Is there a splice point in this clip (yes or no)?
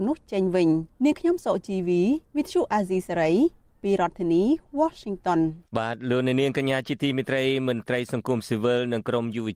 yes